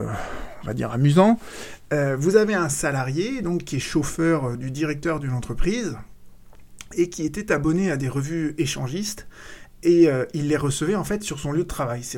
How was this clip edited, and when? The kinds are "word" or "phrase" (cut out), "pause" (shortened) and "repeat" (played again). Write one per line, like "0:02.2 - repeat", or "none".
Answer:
none